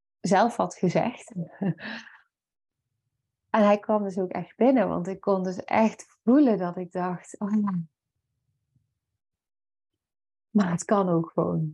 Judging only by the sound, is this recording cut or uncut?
uncut